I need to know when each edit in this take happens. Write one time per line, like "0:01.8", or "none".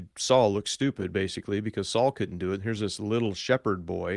none